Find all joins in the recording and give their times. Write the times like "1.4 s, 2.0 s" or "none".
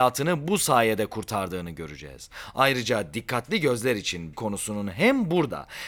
4.3 s